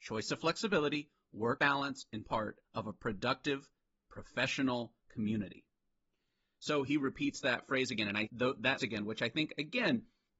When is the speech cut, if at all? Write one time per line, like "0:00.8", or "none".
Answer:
0:01.6
0:02.2
0:02.6
0:05.0
0:08.3
0:08.8